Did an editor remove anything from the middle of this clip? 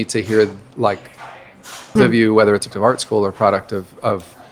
yes; 2 cuts; at 2.0 s, 2.7 s

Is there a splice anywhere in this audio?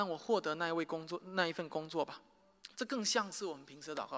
yes; 1 cut; at 2.7 s

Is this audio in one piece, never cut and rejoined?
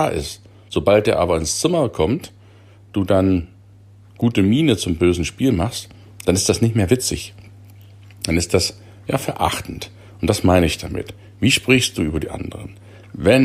yes; 0 cuts

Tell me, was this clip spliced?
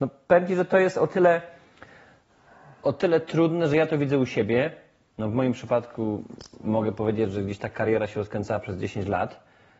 no; 0 cuts

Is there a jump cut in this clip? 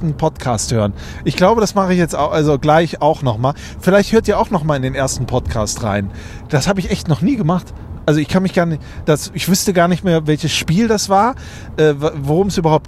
no; 0 cuts

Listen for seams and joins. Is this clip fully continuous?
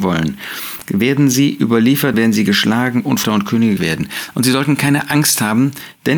no; 3 cuts; at 2.1 s, 3.2 s, 3.8 s

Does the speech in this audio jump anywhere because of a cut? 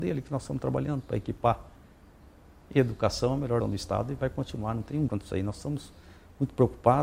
yes; 2 cuts; at 3.6 s, 5.1 s

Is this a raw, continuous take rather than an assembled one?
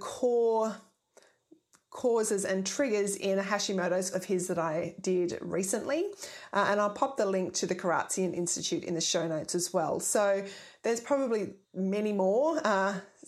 no; 2 cuts; at 4.1 s, 11.6 s

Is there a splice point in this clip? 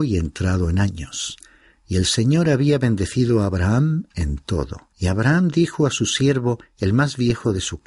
yes; 1 cut; at 4.9 s

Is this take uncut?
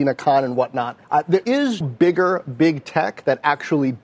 no; 3 cuts; at 1.0 s, 1.4 s, 1.8 s

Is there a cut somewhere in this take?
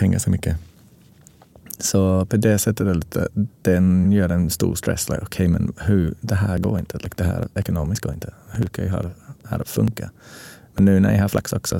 no; 0 cuts

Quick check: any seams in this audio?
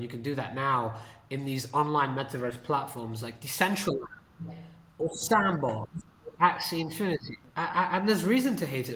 no; 0 cuts

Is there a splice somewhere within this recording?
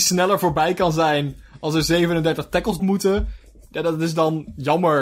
yes; 1 cut; at 2.8 s

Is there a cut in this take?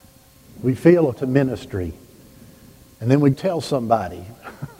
yes; 2 cuts; at 1.1 s, 3.3 s

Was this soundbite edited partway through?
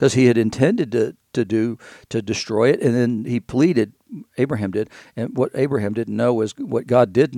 no; 0 cuts

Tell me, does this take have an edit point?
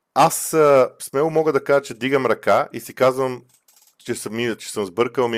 no; 0 cuts

